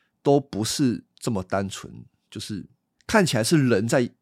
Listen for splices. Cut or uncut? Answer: cut